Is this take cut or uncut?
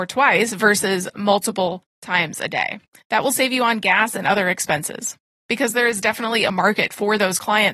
uncut